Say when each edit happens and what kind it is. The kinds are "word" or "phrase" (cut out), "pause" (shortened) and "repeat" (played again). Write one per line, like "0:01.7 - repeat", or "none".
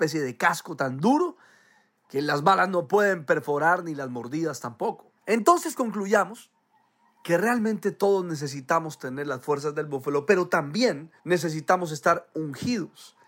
0:05.2 - pause
0:11.2 - pause